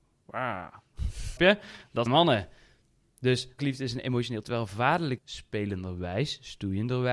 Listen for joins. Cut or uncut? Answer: cut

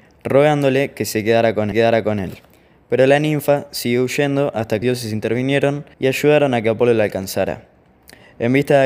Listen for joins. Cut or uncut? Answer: cut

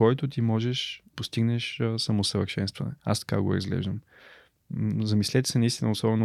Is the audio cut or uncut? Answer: cut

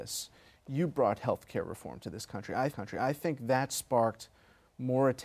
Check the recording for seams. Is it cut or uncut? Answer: cut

